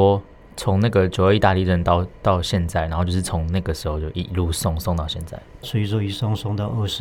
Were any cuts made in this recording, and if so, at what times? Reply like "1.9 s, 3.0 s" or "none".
5.6 s